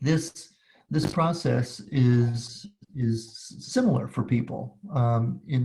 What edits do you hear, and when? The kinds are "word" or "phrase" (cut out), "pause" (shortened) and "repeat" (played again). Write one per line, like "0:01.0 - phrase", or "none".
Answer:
none